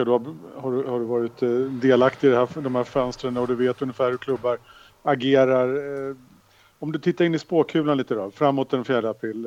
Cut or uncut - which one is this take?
uncut